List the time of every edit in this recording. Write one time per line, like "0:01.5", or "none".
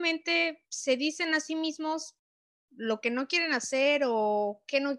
none